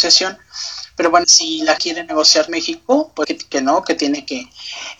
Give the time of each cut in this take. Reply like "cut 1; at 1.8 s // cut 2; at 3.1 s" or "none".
cut 1; at 1.2 s // cut 2; at 1.8 s // cut 3; at 2.5 s // cut 4; at 3.2 s